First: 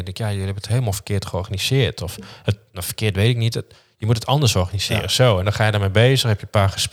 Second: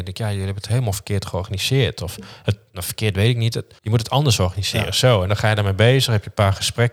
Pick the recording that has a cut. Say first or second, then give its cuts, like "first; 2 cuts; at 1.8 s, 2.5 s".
second; 1 cut; at 3.8 s